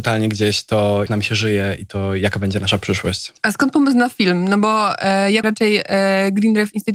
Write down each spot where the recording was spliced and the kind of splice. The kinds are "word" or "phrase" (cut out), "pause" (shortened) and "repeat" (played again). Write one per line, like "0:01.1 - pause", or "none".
0:01.1 - word
0:05.4 - word